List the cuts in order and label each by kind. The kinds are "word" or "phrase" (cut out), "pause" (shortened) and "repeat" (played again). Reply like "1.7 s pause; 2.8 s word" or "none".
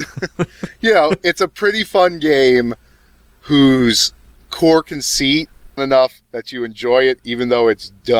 5.8 s phrase; 6.2 s pause